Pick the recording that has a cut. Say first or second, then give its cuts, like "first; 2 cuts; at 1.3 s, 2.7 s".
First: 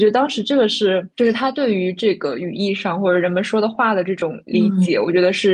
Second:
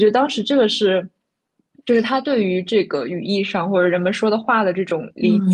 first; 1 cut; at 1.1 s